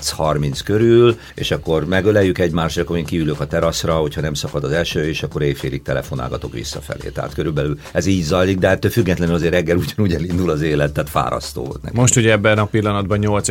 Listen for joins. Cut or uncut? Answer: uncut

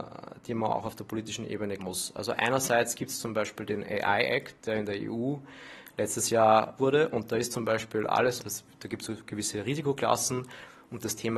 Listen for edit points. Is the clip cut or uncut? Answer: cut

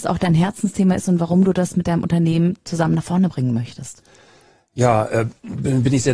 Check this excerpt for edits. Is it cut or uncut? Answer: uncut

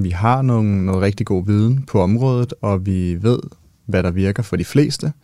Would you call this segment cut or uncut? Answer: uncut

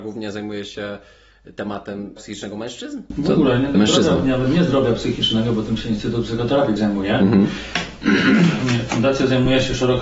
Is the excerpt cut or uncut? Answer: cut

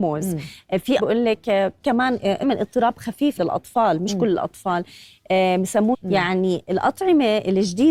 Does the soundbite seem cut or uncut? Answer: cut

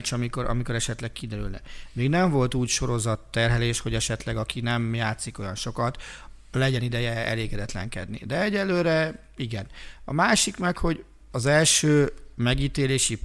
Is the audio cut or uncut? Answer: uncut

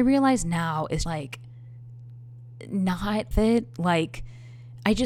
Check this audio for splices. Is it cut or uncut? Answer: cut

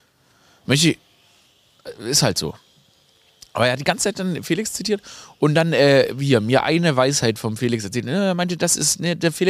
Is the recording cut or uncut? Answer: uncut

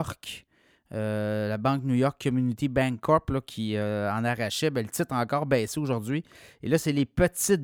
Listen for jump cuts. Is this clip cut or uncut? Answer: uncut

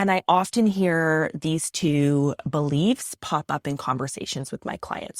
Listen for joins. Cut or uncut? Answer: uncut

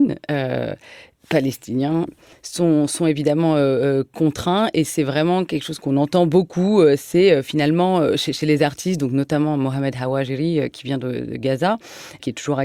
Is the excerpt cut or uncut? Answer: uncut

